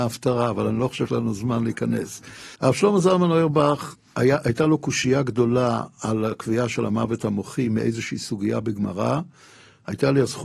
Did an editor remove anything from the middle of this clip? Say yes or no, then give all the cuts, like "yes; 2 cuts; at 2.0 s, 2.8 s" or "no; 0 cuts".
yes; 2 cuts; at 1.1 s, 2.5 s